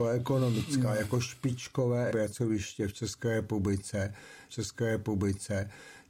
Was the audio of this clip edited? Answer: yes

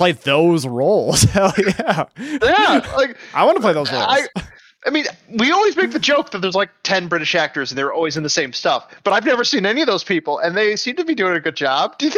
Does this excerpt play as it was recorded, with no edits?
yes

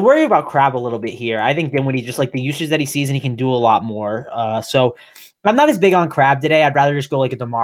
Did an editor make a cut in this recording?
no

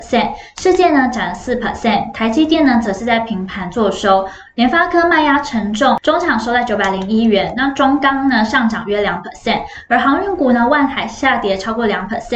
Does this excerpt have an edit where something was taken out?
no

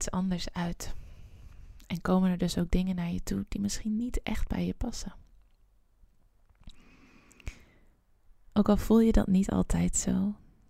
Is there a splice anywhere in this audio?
no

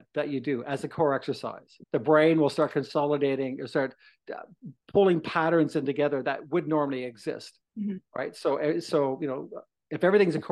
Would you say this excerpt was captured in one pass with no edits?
no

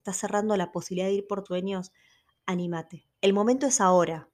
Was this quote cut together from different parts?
yes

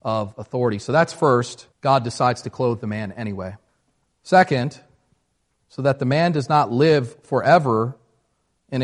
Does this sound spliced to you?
yes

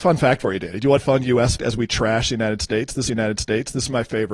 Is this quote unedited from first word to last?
no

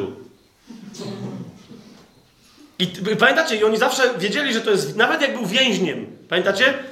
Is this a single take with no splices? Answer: yes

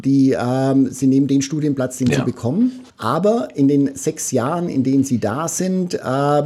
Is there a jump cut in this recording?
yes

